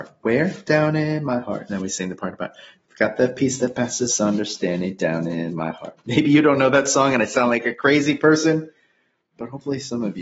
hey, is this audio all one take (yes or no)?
yes